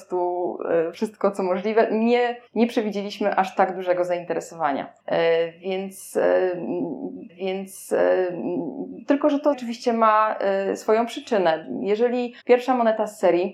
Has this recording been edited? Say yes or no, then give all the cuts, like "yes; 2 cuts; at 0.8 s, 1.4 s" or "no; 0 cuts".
yes; 6 cuts; at 0.9 s, 2.5 s, 5.0 s, 7.3 s, 9.5 s, 12.4 s